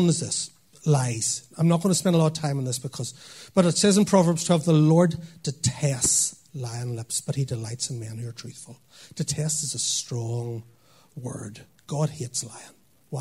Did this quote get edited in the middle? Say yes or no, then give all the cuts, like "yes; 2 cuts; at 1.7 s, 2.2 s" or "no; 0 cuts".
no; 0 cuts